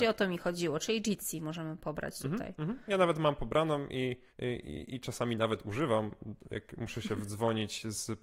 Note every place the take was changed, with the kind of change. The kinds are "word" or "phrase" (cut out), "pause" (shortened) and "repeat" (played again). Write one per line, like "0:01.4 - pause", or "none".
0:04.3 - pause